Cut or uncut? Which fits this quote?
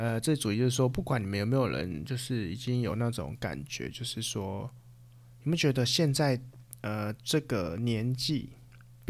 uncut